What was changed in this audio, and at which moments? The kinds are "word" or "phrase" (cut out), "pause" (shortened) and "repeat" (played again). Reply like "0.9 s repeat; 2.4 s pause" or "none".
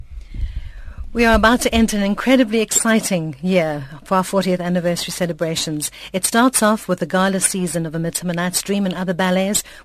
none